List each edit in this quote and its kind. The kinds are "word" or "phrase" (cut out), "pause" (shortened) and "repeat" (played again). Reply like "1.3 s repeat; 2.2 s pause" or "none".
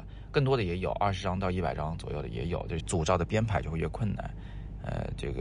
2.8 s phrase